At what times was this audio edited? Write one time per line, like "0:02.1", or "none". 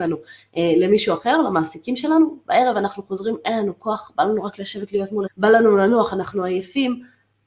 0:05.3